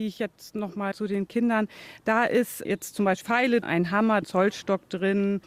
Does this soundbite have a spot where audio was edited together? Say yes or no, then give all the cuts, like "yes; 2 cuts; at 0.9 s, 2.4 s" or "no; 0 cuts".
yes; 5 cuts; at 0.9 s, 2.6 s, 3.2 s, 3.6 s, 4.2 s